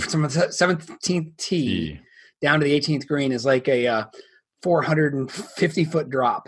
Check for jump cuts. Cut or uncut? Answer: uncut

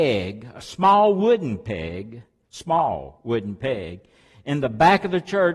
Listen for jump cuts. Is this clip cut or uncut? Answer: uncut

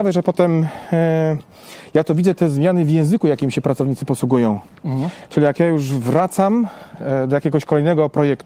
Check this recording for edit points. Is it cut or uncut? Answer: uncut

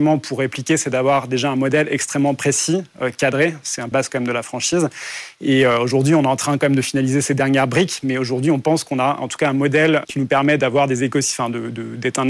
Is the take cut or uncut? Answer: cut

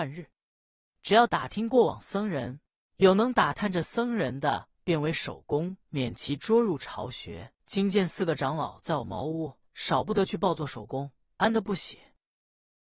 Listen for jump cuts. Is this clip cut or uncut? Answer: cut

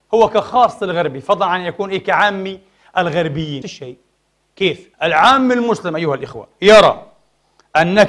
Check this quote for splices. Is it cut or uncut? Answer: cut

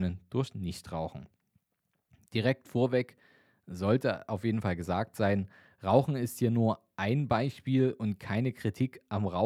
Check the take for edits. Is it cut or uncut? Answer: uncut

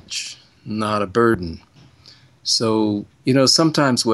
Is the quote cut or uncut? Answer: cut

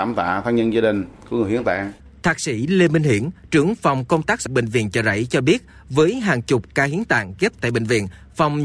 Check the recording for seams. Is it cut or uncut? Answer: cut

